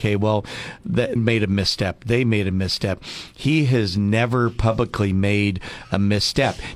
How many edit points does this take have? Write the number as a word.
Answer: one